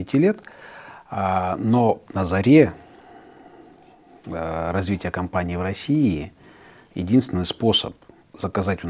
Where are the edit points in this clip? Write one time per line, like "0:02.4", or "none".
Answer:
0:02.1